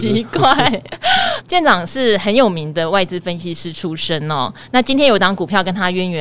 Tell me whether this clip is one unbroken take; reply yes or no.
no